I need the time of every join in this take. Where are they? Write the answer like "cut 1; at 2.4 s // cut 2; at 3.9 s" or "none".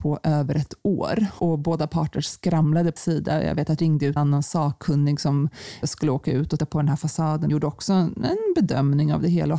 cut 1; at 1.4 s // cut 2; at 3.0 s // cut 3; at 3.8 s // cut 4; at 4.2 s // cut 5; at 5.8 s // cut 6; at 6.6 s // cut 7; at 7.5 s